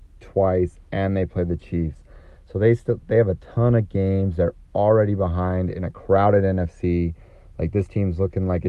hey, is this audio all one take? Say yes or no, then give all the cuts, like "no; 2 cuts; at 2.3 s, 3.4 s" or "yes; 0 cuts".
yes; 0 cuts